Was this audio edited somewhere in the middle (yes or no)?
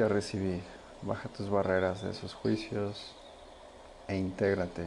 no